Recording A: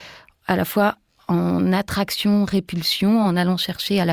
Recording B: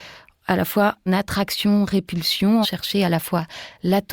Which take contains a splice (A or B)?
B